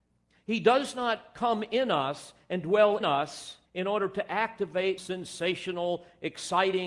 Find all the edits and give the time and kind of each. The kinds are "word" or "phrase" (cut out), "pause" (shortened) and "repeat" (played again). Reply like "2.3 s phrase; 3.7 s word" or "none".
3.0 s word; 3.7 s pause; 5.0 s word